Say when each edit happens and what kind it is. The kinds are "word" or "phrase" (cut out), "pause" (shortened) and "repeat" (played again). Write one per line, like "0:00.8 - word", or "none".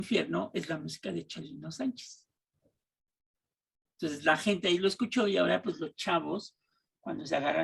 none